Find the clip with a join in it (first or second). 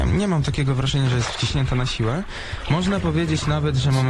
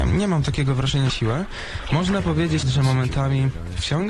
second